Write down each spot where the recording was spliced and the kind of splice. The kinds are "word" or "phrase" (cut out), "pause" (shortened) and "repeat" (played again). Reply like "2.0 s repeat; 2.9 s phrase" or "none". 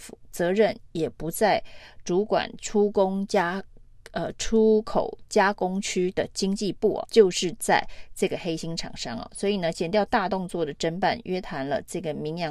7.0 s word